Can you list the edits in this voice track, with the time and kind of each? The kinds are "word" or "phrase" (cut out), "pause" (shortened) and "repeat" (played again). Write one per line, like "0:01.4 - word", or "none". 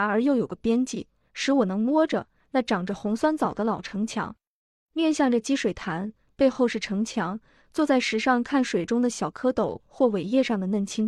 none